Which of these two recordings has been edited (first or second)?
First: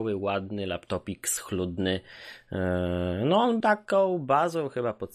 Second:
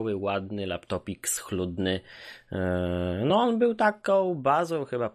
first